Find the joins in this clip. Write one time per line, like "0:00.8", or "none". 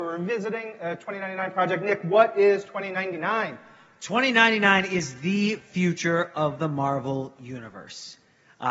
none